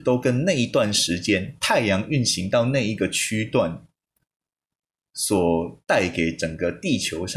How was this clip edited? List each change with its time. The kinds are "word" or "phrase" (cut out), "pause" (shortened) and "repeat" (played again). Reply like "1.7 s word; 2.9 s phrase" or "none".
5.8 s pause